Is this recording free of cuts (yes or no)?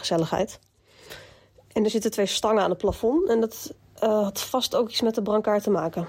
yes